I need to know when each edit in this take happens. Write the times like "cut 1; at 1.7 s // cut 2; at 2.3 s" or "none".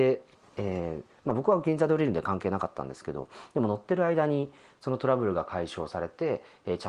none